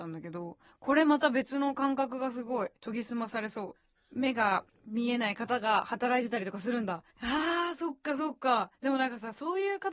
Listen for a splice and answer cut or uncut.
cut